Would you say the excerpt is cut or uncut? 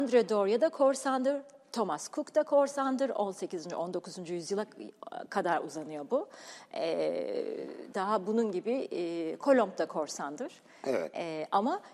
uncut